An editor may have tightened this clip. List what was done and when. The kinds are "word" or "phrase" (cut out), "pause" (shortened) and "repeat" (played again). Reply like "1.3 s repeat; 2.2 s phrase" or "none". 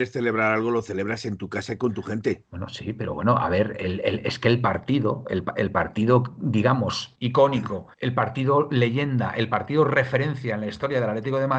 7.1 s word; 7.9 s pause